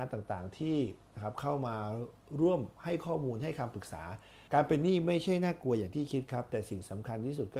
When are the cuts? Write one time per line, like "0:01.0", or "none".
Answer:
0:04.5